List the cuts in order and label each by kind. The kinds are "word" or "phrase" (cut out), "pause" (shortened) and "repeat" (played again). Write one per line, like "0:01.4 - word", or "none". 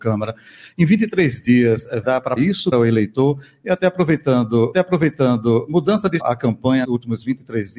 0:02.0 - word
0:02.4 - word
0:02.7 - word
0:04.7 - repeat
0:06.2 - phrase
0:06.8 - word